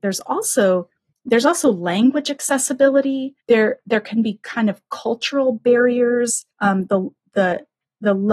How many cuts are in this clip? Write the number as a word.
three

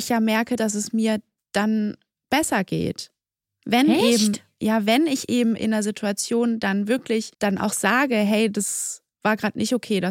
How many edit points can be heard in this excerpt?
one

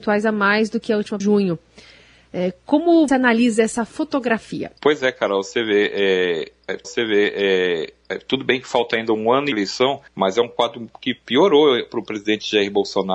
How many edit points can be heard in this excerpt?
six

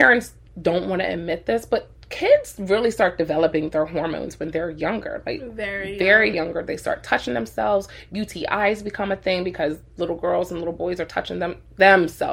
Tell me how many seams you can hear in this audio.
one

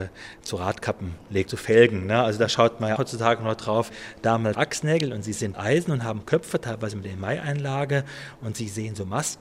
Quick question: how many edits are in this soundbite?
five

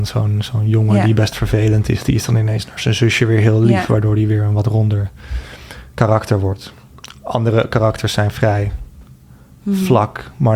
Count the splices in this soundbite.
zero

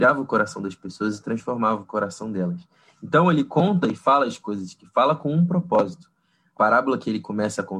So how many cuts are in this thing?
zero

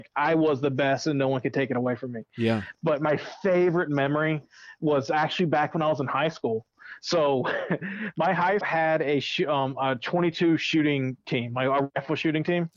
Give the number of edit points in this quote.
one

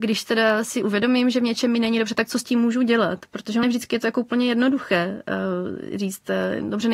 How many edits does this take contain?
one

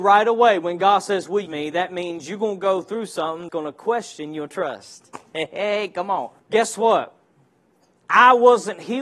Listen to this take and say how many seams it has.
four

